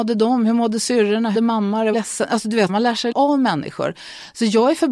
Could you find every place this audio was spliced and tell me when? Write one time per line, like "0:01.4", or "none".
0:01.3
0:01.9
0:02.7
0:03.1